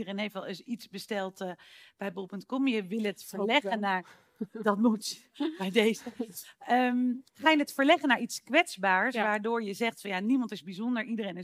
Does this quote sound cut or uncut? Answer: uncut